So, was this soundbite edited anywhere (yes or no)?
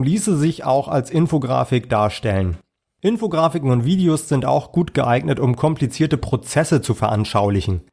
no